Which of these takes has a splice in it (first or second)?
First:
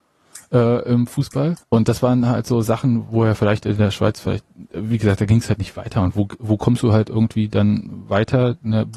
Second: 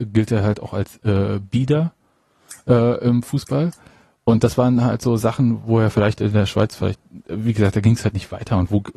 first